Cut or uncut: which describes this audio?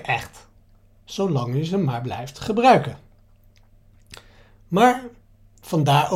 uncut